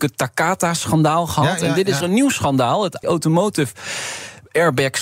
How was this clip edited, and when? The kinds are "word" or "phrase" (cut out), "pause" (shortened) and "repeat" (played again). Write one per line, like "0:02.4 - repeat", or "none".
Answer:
0:02.0 - word
0:03.0 - word